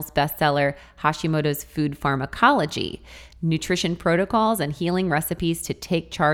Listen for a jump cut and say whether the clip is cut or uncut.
uncut